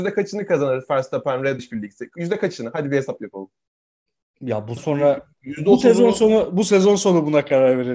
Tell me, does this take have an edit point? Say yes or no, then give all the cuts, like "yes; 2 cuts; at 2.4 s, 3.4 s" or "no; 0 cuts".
yes; 3 cuts; at 1.6 s, 3.7 s, 4.8 s